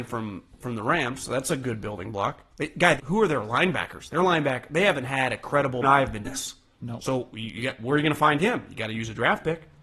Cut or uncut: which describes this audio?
cut